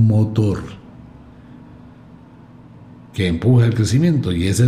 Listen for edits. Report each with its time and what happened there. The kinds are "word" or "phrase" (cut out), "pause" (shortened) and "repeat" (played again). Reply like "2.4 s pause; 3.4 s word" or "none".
none